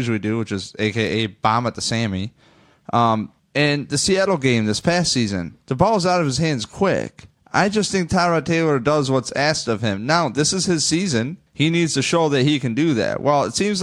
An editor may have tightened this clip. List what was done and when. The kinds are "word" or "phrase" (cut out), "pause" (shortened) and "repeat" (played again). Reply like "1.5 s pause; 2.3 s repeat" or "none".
3.4 s pause; 5.6 s pause; 7.4 s pause; 11.5 s pause